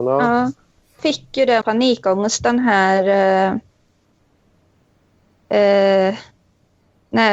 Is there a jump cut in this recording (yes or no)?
yes